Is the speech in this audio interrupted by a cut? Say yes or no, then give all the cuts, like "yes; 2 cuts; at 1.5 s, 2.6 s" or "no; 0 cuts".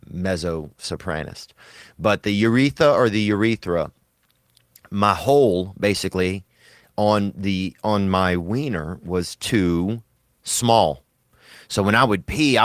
no; 0 cuts